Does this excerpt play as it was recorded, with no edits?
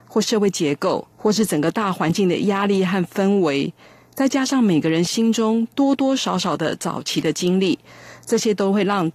no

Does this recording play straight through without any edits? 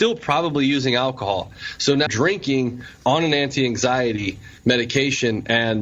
no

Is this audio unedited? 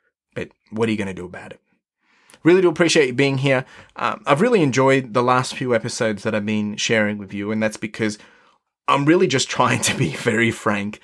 yes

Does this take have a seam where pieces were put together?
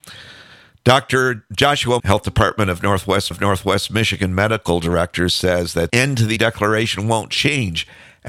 yes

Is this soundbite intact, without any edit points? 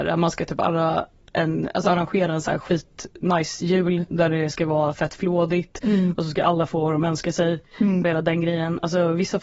yes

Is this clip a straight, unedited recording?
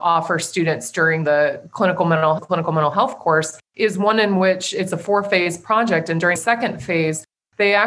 no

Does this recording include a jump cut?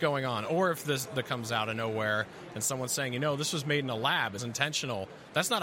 yes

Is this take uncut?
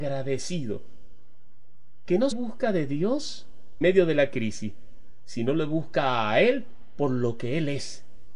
no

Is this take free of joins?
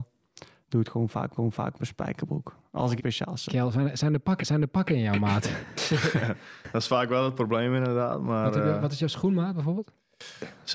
no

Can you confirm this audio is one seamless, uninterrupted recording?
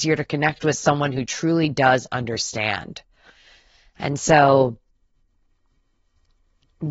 yes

